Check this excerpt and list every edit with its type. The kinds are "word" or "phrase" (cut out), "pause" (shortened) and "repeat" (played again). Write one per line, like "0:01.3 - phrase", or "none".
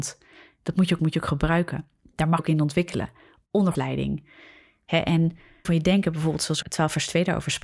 0:01.0 - word
0:02.4 - word
0:03.7 - word
0:05.6 - word
0:06.6 - word

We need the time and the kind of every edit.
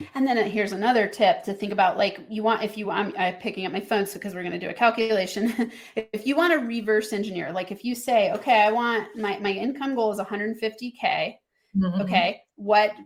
none

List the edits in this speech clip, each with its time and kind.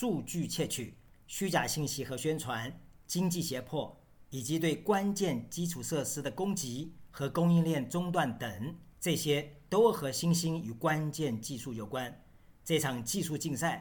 0:08.9 - pause

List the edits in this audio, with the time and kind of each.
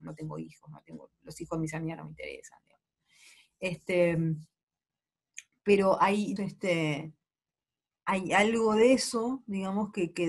0:06.4 - word

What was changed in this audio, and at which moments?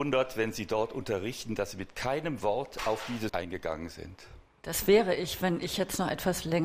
0:03.3 - word

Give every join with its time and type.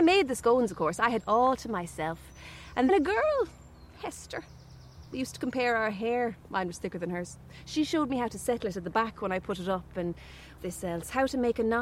0:01.2 - word
0:02.9 - word
0:10.6 - word

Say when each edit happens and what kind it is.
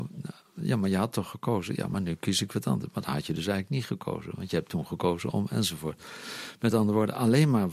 none

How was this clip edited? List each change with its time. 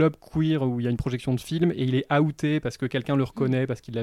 none

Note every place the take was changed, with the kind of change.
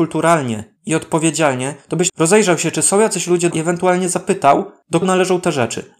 0:02.1 - word
0:03.5 - word
0:05.0 - word

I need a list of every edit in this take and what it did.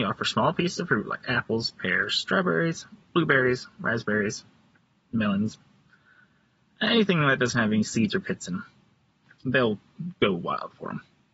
none

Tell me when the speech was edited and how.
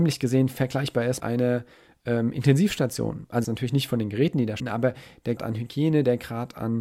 0:01.2 - word
0:03.4 - word
0:04.6 - word
0:05.4 - word

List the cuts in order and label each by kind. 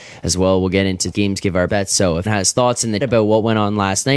0:01.1 - word
0:01.7 - word
0:02.3 - word
0:03.0 - word

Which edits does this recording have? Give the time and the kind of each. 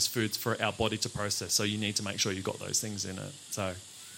none

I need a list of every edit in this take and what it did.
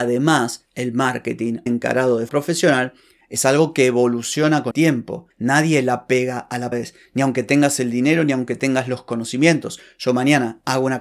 0:01.7 - word
0:02.3 - word
0:04.7 - word
0:06.7 - word

